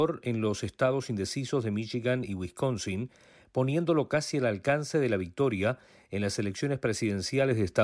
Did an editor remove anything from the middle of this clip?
no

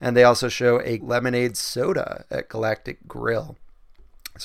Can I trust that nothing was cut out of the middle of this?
no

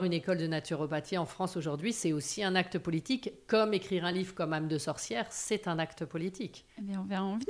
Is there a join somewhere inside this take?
no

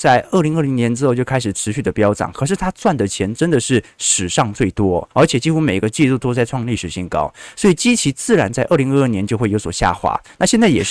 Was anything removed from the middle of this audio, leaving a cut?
yes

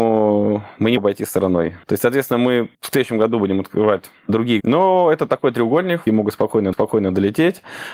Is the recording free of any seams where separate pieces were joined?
no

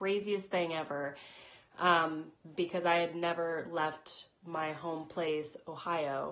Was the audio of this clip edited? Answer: no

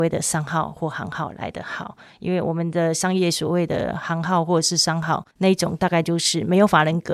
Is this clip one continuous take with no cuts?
no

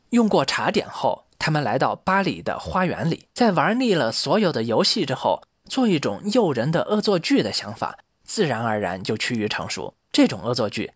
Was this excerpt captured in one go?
no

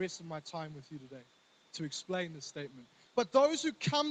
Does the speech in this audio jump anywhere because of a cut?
no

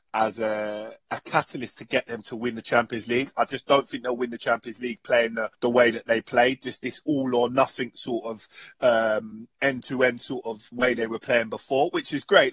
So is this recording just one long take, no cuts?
no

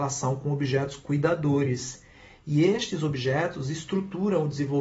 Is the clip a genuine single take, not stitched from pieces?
yes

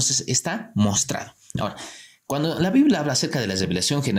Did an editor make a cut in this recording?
no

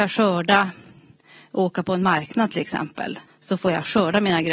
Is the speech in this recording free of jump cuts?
no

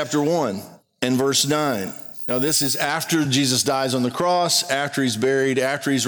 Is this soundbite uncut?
yes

